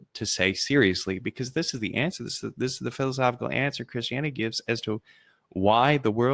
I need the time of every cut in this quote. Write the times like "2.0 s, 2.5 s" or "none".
none